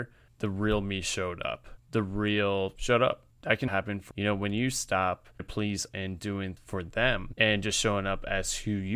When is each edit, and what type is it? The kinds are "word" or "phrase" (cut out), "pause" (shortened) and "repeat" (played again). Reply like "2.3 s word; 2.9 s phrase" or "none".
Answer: 2.8 s word; 3.7 s word; 4.1 s word; 5.4 s word; 5.9 s word; 6.6 s word